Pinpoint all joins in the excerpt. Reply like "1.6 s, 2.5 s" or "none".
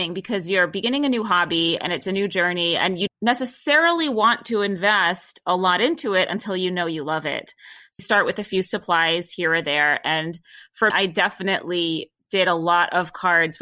3.1 s, 8.0 s, 10.9 s